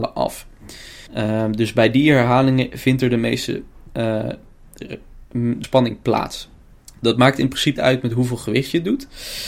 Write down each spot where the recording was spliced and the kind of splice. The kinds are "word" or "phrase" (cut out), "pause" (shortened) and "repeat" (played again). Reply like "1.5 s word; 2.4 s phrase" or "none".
1.1 s pause; 5.6 s phrase; 6.7 s pause; 7.8 s word